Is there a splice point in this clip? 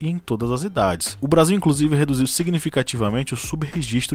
no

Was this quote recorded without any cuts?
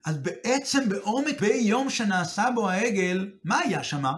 no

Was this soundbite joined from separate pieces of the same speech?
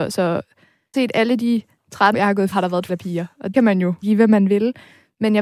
yes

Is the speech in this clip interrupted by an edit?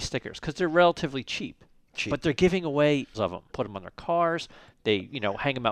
yes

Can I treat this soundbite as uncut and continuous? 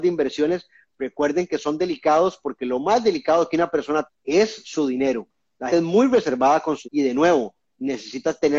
no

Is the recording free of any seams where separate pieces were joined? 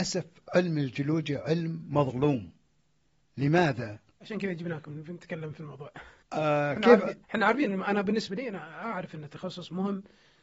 no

